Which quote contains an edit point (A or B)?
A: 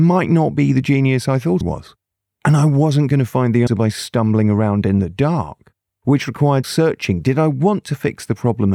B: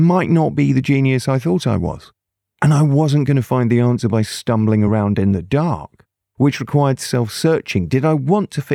A